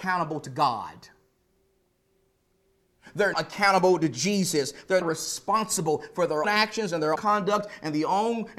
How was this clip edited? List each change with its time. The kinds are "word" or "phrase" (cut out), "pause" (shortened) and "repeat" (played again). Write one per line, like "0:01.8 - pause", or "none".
0:03.3 - word
0:05.0 - word
0:06.4 - word
0:07.2 - word